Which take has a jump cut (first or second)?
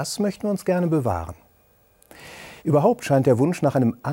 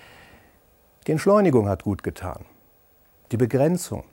first